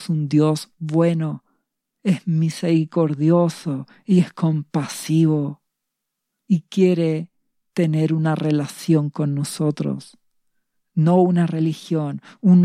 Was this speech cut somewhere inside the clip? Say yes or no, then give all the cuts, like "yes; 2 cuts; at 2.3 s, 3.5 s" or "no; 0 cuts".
no; 0 cuts